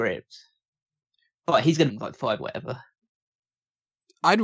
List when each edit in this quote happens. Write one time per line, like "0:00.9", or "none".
0:01.9
0:02.4